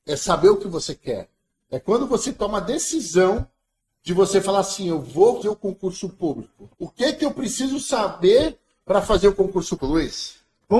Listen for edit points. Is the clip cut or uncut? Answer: cut